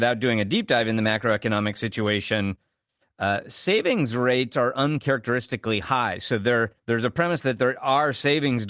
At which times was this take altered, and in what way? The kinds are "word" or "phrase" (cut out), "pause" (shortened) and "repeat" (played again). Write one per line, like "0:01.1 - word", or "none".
0:06.8 - pause

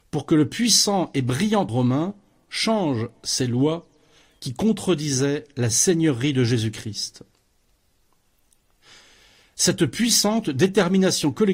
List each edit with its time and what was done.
0:01.7 - word

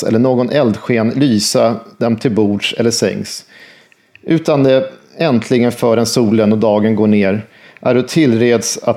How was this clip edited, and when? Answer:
none

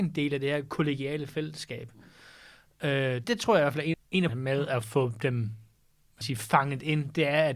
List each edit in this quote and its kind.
0:03.2 - word
0:03.9 - word
0:04.3 - word
0:06.2 - word

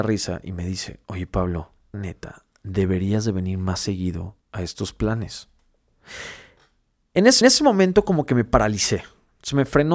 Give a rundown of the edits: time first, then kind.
0:01.0 - pause
0:01.9 - word
0:04.4 - pause
0:07.4 - repeat

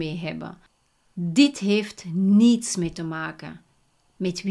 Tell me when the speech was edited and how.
0:02.9 - word

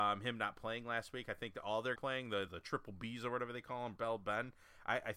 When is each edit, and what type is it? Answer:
0:02.0 - phrase
0:02.5 - word
0:04.0 - word

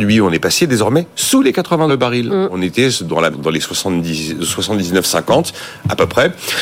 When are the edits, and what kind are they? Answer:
0:01.9 - word
0:03.3 - word

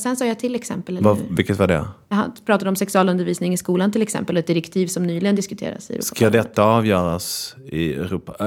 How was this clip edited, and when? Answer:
0:02.0 - pause

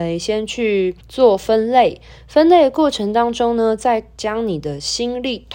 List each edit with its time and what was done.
0:01.0 - pause

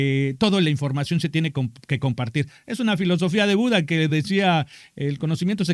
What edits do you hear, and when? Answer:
none

